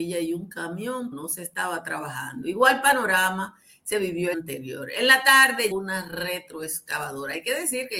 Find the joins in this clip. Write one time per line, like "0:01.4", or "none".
0:01.1
0:04.3
0:05.7